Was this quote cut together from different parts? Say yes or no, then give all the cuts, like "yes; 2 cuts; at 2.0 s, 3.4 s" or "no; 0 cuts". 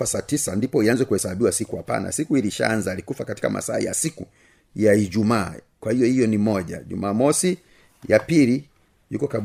no; 0 cuts